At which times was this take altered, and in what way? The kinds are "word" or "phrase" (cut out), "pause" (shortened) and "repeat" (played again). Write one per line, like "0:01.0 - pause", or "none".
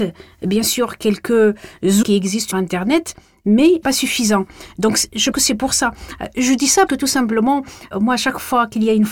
0:02.0 - word
0:02.5 - word
0:03.8 - word
0:05.3 - word
0:06.9 - word